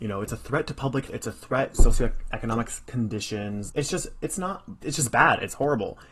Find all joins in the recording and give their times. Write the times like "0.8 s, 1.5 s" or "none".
1.1 s, 1.7 s, 3.7 s, 4.8 s